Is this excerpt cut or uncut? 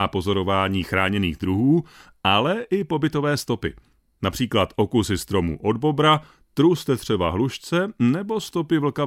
uncut